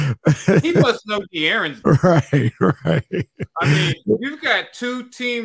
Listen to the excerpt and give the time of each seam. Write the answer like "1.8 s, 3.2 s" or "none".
1.8 s